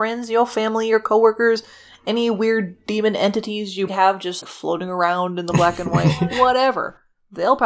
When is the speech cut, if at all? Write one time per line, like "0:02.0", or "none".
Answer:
0:03.9
0:04.4